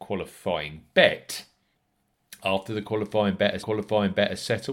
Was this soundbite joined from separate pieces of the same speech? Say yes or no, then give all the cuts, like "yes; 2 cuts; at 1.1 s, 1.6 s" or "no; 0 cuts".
yes; 1 cut; at 3.6 s